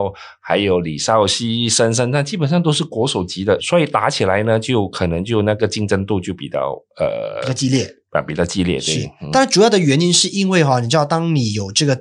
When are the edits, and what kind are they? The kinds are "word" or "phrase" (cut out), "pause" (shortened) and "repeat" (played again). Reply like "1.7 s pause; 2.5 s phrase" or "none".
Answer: 3.6 s word